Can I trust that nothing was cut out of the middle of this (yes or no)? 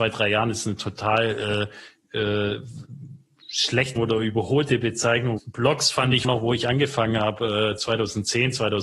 no